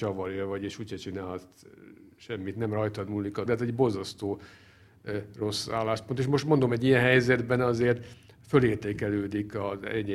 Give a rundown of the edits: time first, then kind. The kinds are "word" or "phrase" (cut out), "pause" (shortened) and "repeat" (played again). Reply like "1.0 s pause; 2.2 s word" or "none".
3.5 s word